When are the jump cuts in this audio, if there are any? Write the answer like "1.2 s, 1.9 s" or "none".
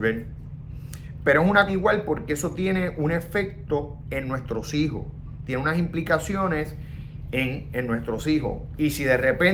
1.7 s